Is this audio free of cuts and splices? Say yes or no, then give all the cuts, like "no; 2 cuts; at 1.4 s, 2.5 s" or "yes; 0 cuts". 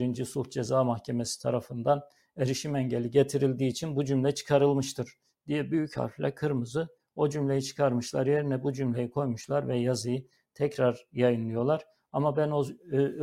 yes; 0 cuts